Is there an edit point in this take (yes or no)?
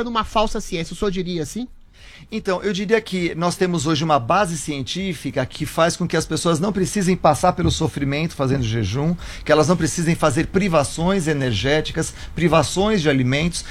no